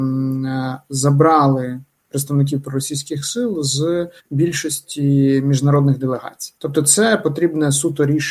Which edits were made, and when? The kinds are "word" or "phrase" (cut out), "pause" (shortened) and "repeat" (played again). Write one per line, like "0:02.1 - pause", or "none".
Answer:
0:04.2 - pause
0:06.6 - pause